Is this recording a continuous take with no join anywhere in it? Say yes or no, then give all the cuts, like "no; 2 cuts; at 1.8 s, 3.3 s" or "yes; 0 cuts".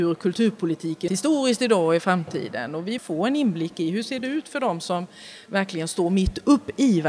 no; 2 cuts; at 1.1 s, 3.0 s